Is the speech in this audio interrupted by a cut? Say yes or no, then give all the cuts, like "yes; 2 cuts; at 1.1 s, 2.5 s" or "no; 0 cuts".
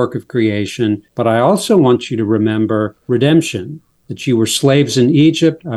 yes; 2 cuts; at 1.1 s, 3.0 s